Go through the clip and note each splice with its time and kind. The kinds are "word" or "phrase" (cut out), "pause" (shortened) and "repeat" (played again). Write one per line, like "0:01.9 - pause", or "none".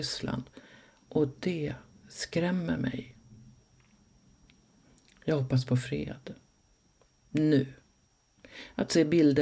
none